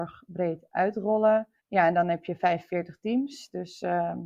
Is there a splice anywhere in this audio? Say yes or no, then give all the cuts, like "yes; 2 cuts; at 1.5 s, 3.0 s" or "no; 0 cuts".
yes; 1 cut; at 1.6 s